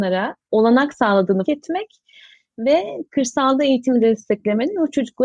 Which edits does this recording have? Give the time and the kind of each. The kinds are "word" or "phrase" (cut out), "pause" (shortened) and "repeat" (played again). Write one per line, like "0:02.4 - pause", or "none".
0:01.5 - word